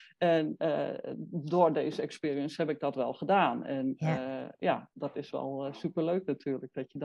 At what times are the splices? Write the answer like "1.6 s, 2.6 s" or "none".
4.9 s